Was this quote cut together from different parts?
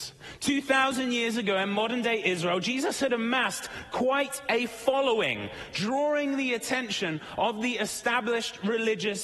no; 0 cuts

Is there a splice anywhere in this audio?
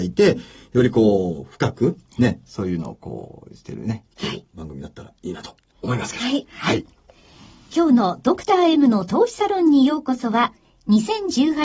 no; 0 cuts

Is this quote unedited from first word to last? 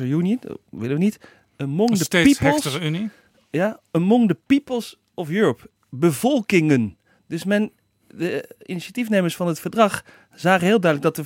yes; 0 cuts

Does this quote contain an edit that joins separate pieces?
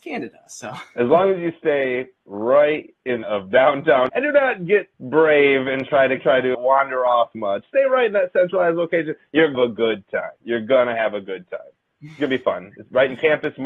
yes; 8 cuts; at 3.2 s, 4.1 s, 4.9 s, 6.2 s, 6.5 s, 7.3 s, 9.5 s, 10.4 s

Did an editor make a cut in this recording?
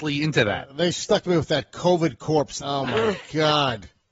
no; 0 cuts

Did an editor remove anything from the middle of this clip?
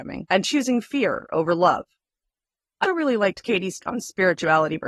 yes; 2 cuts; at 2.8 s, 3.8 s

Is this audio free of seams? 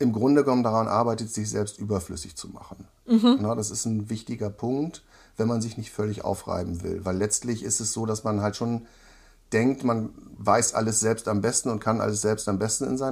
yes; 0 cuts

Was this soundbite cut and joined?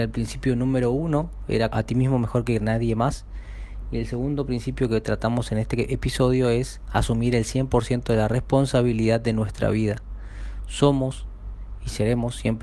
yes; 1 cut; at 1.7 s

